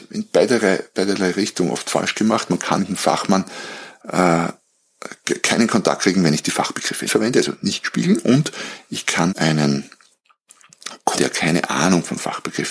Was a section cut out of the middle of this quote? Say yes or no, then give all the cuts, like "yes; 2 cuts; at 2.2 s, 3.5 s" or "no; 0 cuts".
yes; 4 cuts; at 2.8 s, 7.1 s, 9.3 s, 11.2 s